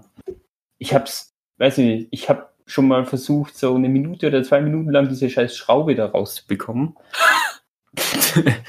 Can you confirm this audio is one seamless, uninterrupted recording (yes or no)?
yes